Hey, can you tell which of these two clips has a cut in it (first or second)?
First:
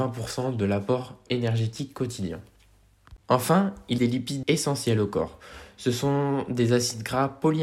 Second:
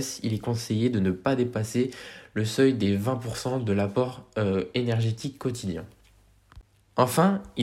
first